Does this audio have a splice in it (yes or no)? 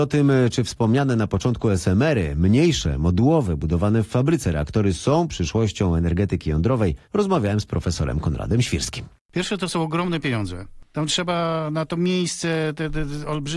yes